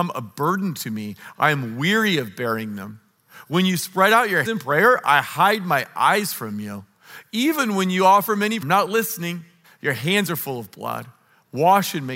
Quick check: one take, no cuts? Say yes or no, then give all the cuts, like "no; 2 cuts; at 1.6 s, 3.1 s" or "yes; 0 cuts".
no; 3 cuts; at 4.4 s, 8.6 s, 9.6 s